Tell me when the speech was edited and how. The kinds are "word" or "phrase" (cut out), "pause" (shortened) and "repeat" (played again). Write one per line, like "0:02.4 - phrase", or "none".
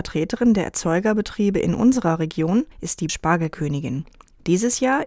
0:02.7 - pause
0:03.1 - word